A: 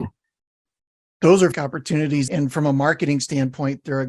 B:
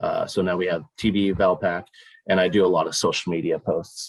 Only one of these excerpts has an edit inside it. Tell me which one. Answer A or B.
A